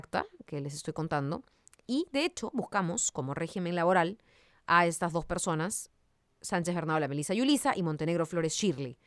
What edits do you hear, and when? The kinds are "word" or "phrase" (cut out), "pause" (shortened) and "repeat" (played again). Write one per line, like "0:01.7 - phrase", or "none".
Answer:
none